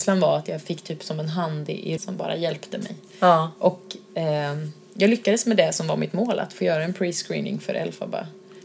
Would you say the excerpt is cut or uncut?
cut